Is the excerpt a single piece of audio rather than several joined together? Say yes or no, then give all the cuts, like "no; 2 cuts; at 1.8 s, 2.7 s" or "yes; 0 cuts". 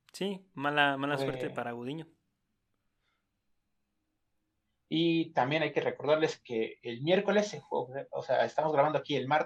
yes; 0 cuts